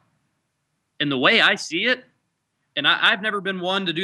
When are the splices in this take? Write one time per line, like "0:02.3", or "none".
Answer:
none